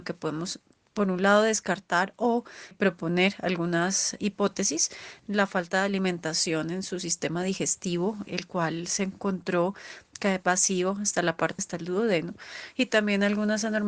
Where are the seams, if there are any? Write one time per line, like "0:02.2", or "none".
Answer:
0:02.7
0:04.2
0:08.3
0:11.6